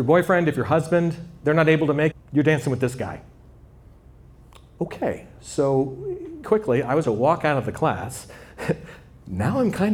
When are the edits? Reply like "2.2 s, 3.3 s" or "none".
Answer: 2.1 s, 6.4 s, 7.0 s